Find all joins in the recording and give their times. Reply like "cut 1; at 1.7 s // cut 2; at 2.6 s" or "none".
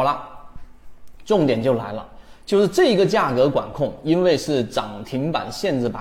none